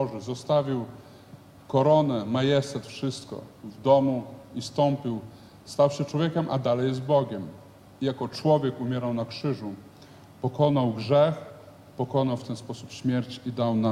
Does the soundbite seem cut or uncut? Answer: uncut